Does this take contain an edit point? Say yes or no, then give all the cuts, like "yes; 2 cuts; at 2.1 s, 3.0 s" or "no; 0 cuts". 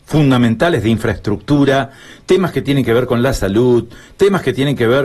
no; 0 cuts